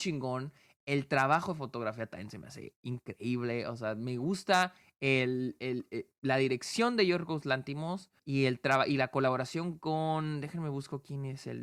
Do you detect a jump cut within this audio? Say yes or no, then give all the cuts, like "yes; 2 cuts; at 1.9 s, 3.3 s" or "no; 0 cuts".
yes; 1 cut; at 8.2 s